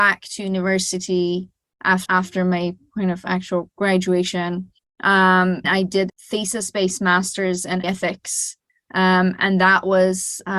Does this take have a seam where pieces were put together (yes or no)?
yes